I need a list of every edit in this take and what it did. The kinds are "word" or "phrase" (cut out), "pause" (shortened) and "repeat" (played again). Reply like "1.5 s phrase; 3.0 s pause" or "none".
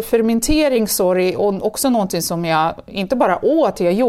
none